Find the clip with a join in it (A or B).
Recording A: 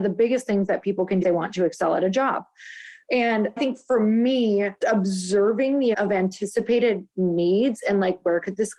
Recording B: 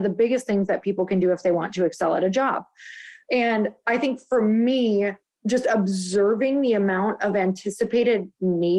A